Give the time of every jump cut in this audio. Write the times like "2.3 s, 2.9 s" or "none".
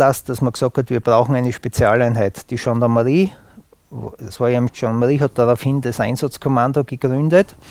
4.7 s